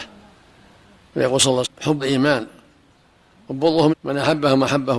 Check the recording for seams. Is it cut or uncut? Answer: cut